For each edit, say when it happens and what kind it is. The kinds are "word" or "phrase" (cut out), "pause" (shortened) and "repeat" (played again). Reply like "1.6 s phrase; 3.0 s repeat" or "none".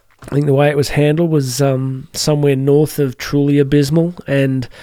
none